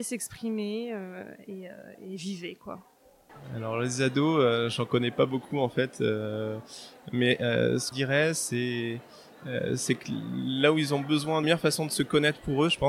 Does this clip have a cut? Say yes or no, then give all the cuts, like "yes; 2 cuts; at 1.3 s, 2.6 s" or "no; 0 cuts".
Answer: yes; 2 cuts; at 7.9 s, 11.4 s